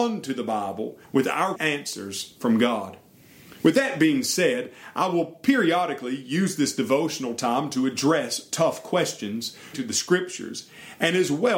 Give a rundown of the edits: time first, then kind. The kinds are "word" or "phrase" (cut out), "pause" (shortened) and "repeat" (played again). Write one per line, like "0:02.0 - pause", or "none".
0:01.0 - pause
0:01.5 - phrase
0:03.6 - pause
0:09.7 - word